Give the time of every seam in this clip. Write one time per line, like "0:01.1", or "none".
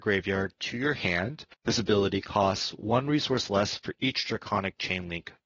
0:01.5